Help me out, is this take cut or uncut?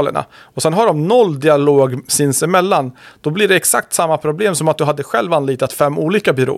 uncut